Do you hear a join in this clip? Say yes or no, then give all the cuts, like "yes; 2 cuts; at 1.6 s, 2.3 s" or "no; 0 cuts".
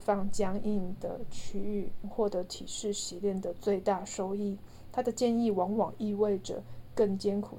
yes; 1 cut; at 2.0 s